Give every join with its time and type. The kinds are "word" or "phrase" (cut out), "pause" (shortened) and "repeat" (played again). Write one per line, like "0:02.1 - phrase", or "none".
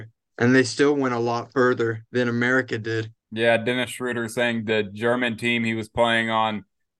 0:03.2 - pause